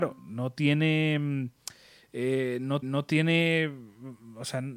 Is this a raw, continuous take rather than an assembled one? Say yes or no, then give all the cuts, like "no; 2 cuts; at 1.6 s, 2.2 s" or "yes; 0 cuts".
no; 1 cut; at 2.8 s